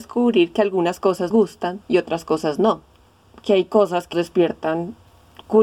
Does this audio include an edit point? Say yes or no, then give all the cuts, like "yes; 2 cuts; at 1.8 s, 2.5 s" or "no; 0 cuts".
yes; 2 cuts; at 1.3 s, 4.1 s